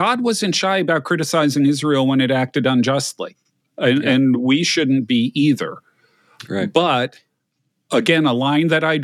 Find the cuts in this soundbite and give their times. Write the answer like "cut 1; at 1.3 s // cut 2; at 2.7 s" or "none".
none